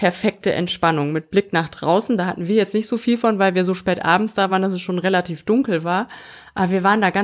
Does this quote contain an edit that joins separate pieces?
no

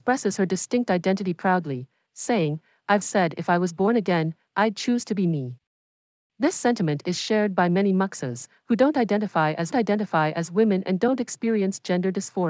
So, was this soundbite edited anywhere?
yes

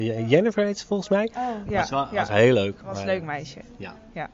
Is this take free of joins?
yes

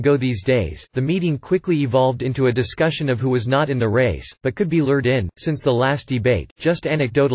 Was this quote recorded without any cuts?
yes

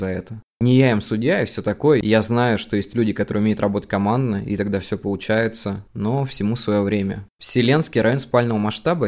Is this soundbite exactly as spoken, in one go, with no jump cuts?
yes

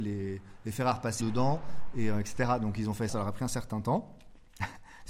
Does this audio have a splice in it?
yes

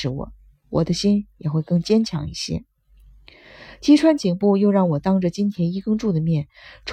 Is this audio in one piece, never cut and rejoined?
yes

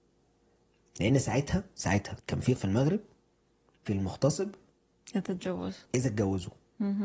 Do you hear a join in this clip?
yes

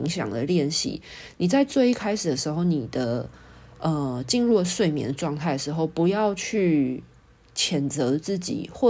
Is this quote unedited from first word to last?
yes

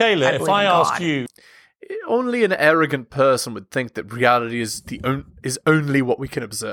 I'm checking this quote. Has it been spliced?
no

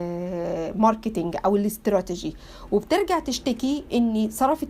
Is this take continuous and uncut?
yes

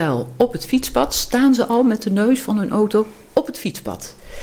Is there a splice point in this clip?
no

